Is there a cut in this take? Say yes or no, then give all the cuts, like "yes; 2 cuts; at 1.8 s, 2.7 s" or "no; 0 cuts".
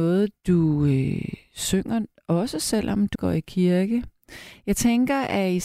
yes; 1 cut; at 3.1 s